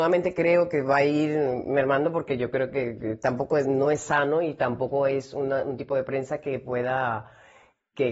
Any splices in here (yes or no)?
no